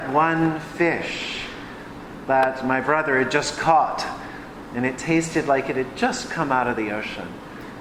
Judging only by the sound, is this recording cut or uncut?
uncut